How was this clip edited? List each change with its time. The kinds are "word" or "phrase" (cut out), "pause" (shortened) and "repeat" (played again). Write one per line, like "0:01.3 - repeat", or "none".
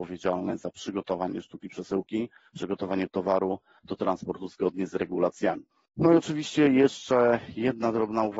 none